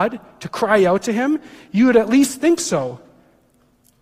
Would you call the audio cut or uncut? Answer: uncut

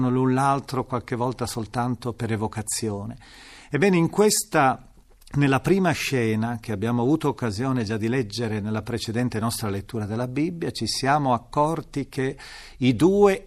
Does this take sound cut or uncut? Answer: uncut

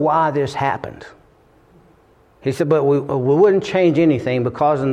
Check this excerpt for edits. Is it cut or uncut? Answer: uncut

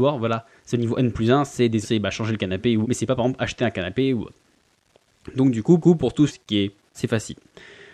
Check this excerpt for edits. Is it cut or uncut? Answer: cut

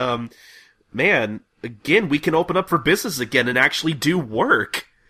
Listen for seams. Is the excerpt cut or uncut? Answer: uncut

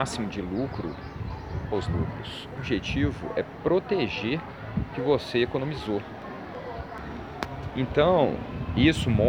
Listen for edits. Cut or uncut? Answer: cut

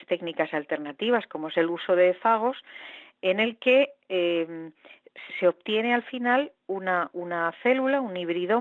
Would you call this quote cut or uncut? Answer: cut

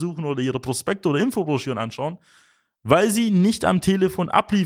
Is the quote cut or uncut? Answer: uncut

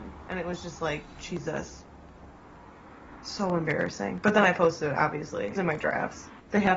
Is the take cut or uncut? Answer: cut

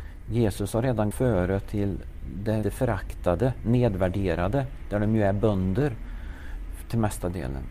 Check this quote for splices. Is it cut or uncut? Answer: cut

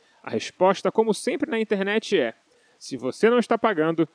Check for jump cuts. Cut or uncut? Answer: uncut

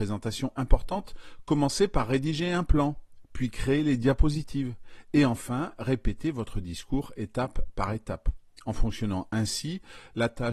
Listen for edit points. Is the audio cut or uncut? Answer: cut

